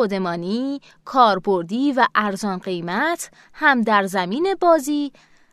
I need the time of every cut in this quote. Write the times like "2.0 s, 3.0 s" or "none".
none